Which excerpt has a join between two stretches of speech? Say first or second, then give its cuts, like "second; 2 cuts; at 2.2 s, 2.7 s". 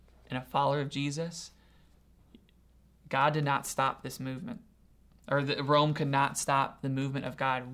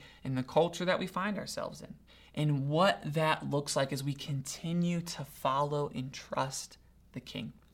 second; 1 cut; at 2.1 s